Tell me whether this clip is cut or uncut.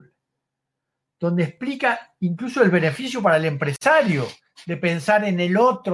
uncut